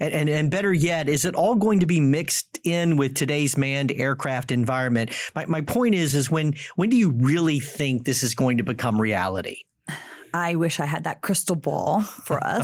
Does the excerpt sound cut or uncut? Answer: uncut